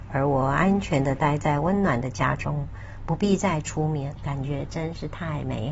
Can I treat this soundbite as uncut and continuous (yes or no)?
no